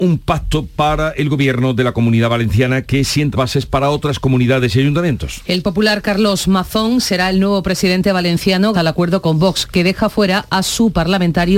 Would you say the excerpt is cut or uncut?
cut